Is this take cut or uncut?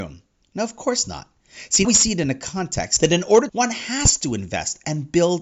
cut